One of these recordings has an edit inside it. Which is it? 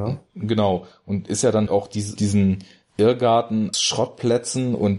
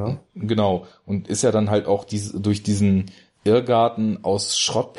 first; 3 cuts; at 1.7 s, 2.2 s, 3.7 s

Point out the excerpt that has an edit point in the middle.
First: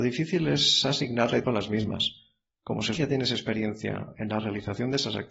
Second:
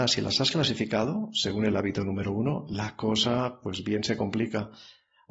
first; 2 cuts; at 1.4 s, 3.0 s

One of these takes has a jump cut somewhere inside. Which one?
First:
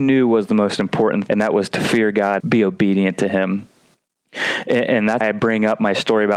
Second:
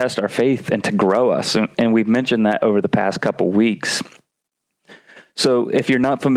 first; 3 cuts; at 1.3 s, 2.4 s, 5.2 s

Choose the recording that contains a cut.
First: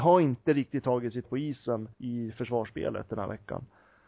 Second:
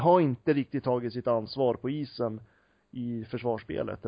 first; 2 cuts; at 1.2 s, 1.9 s

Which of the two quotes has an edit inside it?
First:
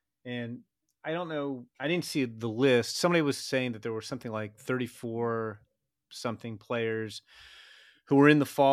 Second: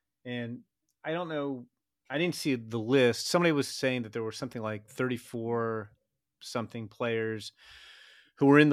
first; 1 cut; at 1.7 s

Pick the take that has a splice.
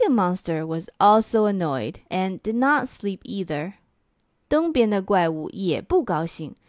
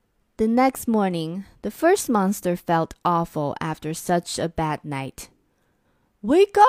first; 1 cut; at 2.1 s

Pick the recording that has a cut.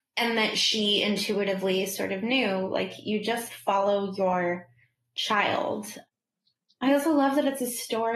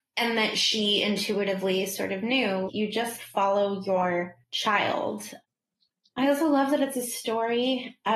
second; 2 cuts; at 2.7 s, 4.4 s

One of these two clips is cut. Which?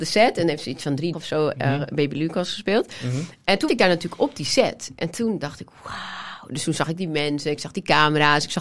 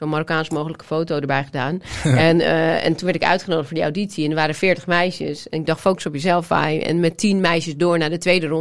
first; 2 cuts; at 1.1 s, 3.7 s

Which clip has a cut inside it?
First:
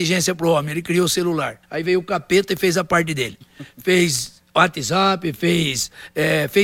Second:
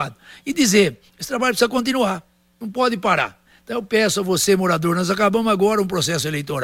first; 1 cut; at 1.6 s

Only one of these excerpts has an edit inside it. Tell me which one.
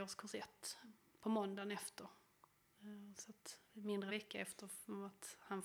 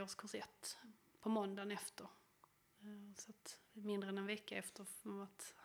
first; 1 cut; at 4.1 s

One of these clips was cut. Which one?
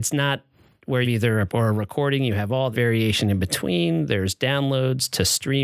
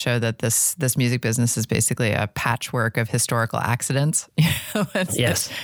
first; 3 cuts; at 1.0 s, 1.5 s, 2.7 s

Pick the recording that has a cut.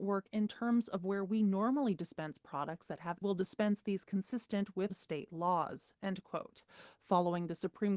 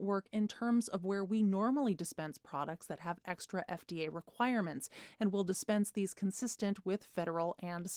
first; 2 cuts; at 3.2 s, 4.9 s

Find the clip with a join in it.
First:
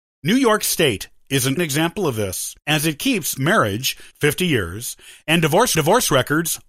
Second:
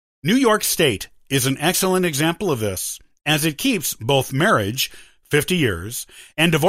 first; 5 cuts; at 1.6 s, 2.6 s, 3.4 s, 4.1 s, 5.7 s

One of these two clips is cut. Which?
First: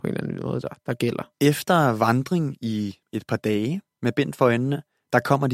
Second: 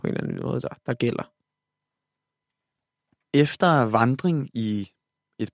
first; 3 cuts; at 1.3 s, 3.0 s, 3.9 s

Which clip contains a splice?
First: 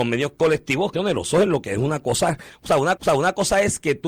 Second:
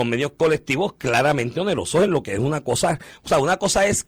first; 2 cuts; at 0.9 s, 3.0 s

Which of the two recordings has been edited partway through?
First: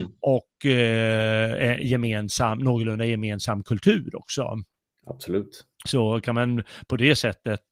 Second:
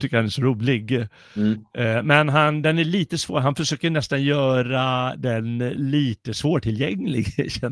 first; 1 cut; at 5.7 s

